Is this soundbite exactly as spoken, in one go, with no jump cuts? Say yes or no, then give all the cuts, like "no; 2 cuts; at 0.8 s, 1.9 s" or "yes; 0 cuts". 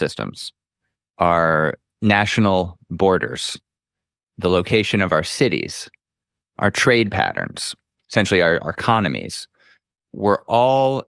yes; 0 cuts